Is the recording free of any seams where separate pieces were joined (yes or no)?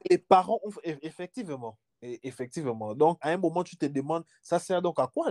no